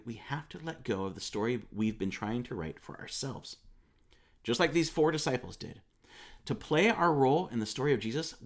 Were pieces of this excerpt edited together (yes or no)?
no